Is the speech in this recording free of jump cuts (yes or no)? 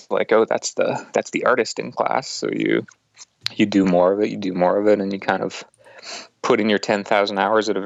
yes